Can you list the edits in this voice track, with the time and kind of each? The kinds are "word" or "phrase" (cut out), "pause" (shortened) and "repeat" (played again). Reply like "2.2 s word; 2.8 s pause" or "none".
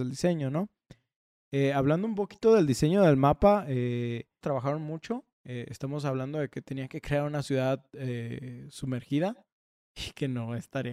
4.4 s phrase; 5.3 s pause